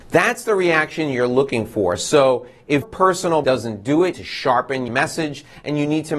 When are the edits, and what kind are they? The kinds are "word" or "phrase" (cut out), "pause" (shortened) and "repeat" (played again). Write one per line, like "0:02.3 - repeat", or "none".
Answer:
0:02.8 - word
0:03.4 - word
0:04.1 - phrase
0:04.9 - phrase